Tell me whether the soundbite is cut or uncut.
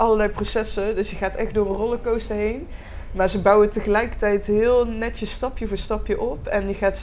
uncut